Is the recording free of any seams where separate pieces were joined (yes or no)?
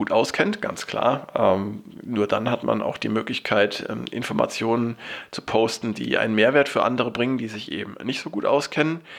yes